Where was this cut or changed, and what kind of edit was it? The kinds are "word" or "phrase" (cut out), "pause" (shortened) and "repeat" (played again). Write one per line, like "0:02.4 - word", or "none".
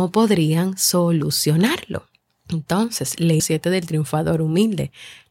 0:02.2 - pause
0:03.4 - word